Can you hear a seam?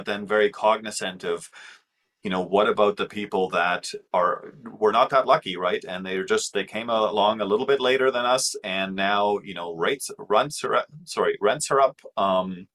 no; 0 cuts

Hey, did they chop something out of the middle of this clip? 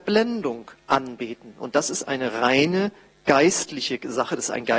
no; 0 cuts

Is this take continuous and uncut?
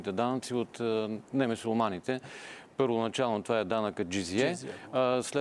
yes; 0 cuts

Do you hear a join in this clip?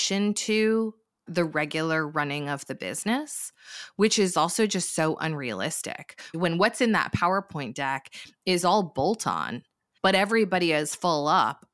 no; 0 cuts

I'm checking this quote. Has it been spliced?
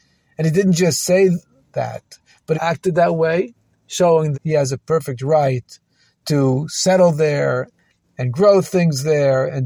yes; 2 cuts; at 2.5 s, 4.3 s

